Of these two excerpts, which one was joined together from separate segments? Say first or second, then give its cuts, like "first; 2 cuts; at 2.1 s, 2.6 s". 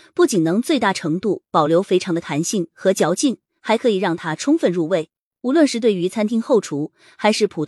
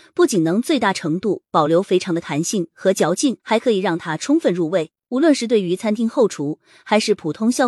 second; 2 cuts; at 3.4 s, 5.0 s